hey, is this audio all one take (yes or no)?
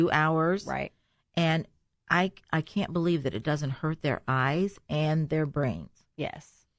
yes